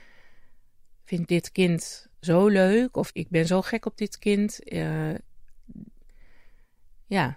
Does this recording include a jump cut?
yes; 2 cuts; at 2.1 s, 3.1 s

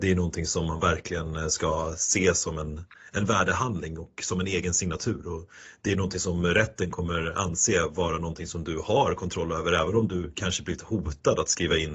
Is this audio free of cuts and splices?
yes; 0 cuts

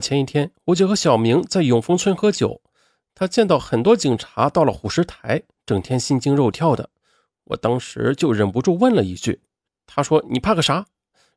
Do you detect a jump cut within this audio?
yes; 1 cut; at 9.7 s

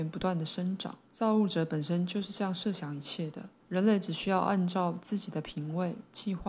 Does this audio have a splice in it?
yes; 2 cuts; at 1.1 s, 3.6 s

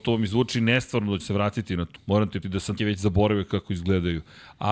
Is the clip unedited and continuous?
no; 4 cuts; at 1.2 s, 2.0 s, 2.4 s, 2.8 s

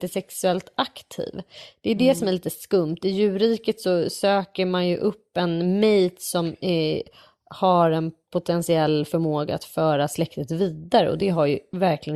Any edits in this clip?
no; 0 cuts

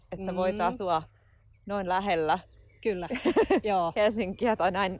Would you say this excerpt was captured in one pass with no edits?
yes; 0 cuts

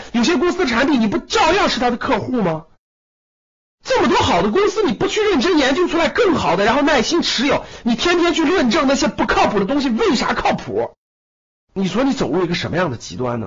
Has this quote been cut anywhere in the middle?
no; 0 cuts

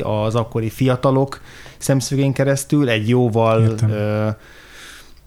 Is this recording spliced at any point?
no; 0 cuts

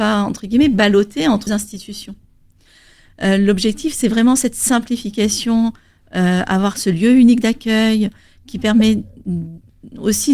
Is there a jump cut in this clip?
yes; 1 cut; at 1.5 s

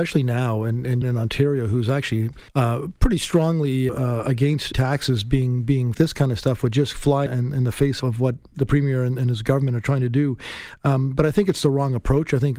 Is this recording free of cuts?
no; 7 cuts; at 1.0 s, 2.5 s, 3.9 s, 4.7 s, 5.9 s, 7.3 s, 8.0 s

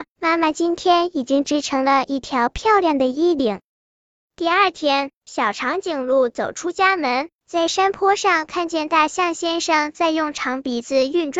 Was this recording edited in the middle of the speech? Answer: yes; 1 cut; at 4.0 s

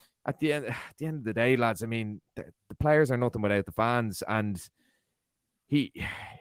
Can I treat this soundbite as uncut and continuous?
yes; 0 cuts

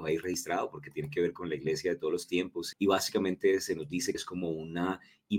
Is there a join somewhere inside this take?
yes; 2 cuts; at 2.7 s, 4.1 s

